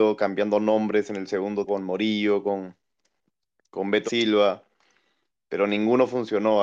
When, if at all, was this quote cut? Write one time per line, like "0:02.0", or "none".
0:01.7
0:04.1